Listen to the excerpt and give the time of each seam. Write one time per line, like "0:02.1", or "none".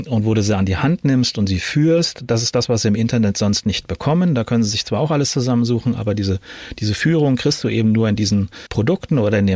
0:08.7

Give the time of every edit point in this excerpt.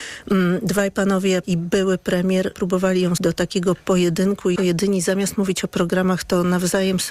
0:01.4
0:02.5
0:03.2
0:04.6

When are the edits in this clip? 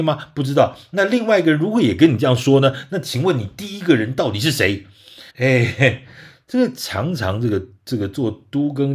0:05.3

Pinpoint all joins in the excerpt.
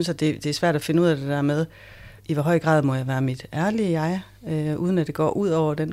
0:02.2

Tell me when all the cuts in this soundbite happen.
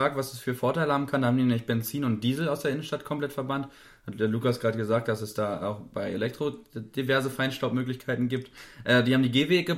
none

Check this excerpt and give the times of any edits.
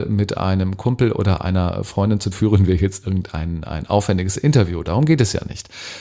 0:02.3

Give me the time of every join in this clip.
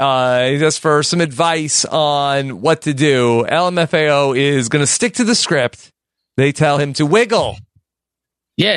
none

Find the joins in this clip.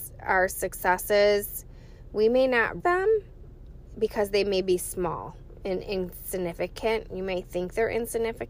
0:02.8

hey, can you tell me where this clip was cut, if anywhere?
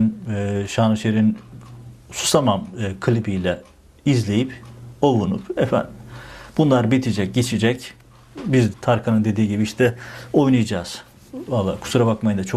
0:05.6
0:08.7

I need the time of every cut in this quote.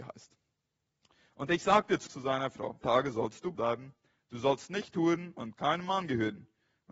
0:02.1
0:02.8
0:03.6

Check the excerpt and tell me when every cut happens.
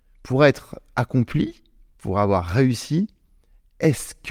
none

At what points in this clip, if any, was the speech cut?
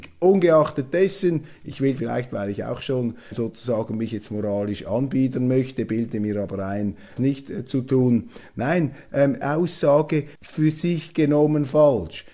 0:02.0
0:03.3
0:07.2
0:09.4
0:10.3

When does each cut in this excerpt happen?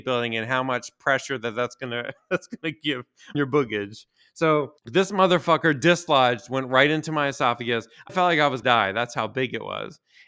0:03.3
0:04.8
0:08.1
0:08.6

